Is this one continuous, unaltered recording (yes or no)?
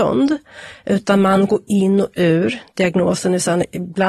no